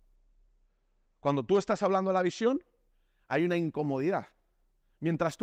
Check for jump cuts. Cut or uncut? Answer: uncut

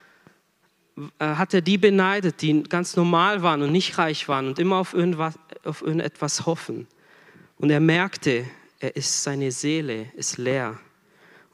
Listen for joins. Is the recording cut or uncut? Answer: uncut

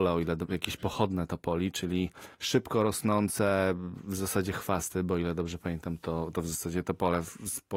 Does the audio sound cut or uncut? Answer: cut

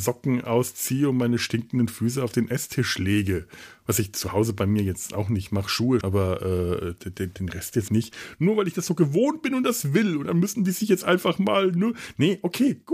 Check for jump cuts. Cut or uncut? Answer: cut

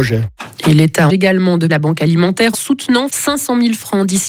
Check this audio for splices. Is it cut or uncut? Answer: cut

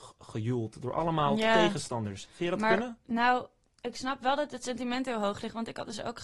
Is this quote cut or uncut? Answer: uncut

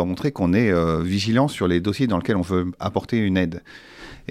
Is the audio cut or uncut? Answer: uncut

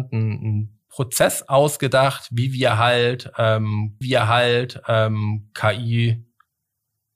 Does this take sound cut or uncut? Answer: cut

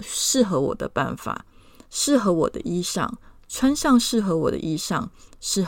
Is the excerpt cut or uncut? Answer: uncut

